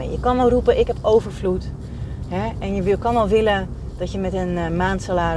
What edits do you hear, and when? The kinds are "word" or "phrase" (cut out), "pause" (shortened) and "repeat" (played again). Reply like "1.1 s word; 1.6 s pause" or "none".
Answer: none